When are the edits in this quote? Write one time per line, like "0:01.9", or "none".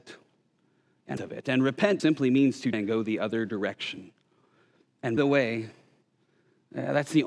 0:01.2
0:02.0
0:02.7
0:05.2